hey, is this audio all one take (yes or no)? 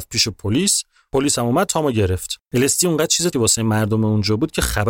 no